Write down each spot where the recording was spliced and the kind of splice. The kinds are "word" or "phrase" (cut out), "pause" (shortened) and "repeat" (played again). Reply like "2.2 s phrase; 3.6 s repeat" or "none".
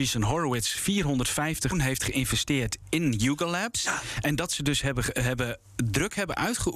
1.7 s word